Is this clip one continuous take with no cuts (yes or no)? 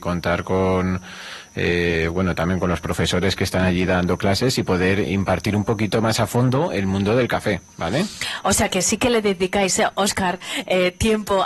yes